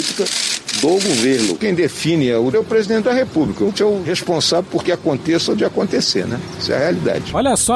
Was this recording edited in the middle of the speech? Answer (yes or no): yes